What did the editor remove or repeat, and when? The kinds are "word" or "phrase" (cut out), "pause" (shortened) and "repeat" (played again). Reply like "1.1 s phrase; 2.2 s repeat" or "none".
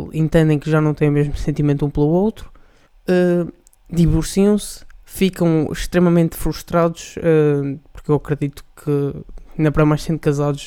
2.9 s pause; 5.0 s pause